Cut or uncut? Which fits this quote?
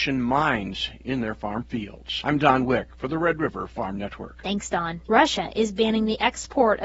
uncut